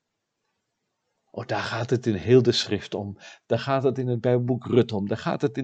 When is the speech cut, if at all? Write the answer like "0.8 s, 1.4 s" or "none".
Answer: none